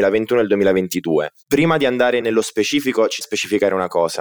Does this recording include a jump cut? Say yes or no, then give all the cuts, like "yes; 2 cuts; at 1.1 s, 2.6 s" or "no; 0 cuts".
yes; 2 cuts; at 2.2 s, 3.2 s